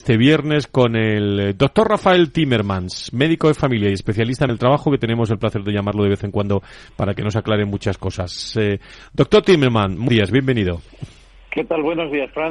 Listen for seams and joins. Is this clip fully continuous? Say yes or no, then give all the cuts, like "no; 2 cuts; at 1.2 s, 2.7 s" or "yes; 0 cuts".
no; 2 cuts; at 4.5 s, 10.1 s